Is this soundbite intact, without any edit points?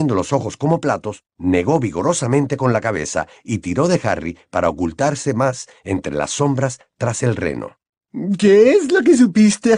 no; 1 cut; at 1.3 s

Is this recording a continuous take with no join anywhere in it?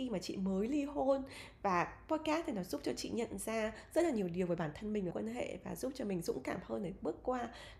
no; 1 cut; at 5.1 s

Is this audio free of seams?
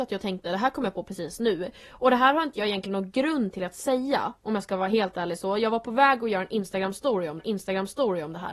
no; 1 cut; at 7.4 s

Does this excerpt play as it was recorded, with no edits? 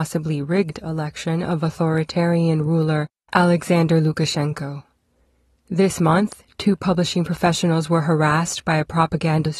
yes; 0 cuts

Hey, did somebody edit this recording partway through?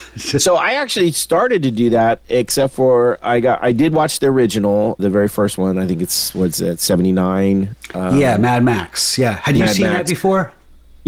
yes; 1 cut; at 5.0 s

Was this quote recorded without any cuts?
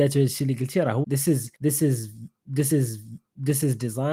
no; 3 cuts; at 1.0 s, 1.5 s, 2.7 s

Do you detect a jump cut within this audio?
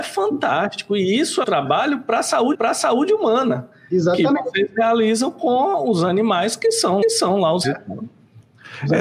yes; 4 cuts; at 1.4 s, 2.5 s, 7.0 s, 7.6 s

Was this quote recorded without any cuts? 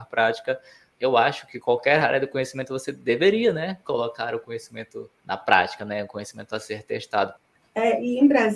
no; 1 cut; at 0.9 s

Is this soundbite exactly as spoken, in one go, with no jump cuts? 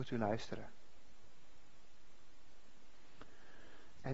yes; 0 cuts

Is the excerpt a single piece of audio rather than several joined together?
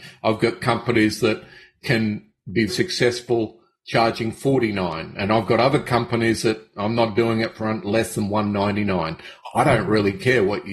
no; 1 cut; at 2.7 s

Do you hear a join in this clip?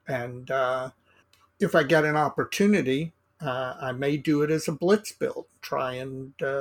yes; 1 cut; at 1.2 s

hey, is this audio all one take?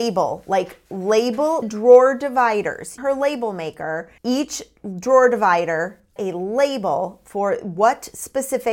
no; 4 cuts; at 1.6 s, 3.0 s, 4.2 s, 6.2 s

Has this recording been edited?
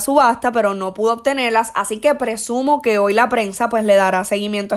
no; 0 cuts

